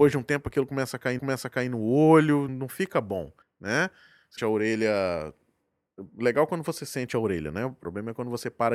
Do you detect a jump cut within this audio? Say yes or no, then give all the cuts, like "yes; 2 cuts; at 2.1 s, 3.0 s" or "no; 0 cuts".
yes; 4 cuts; at 1.2 s, 2.5 s, 3.4 s, 4.4 s